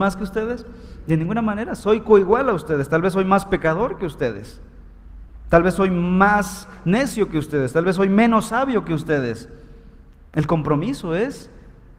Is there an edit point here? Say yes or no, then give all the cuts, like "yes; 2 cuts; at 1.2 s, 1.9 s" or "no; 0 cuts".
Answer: no; 0 cuts